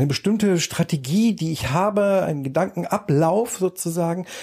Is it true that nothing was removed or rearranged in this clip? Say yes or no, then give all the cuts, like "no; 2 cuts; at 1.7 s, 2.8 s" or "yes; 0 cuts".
yes; 0 cuts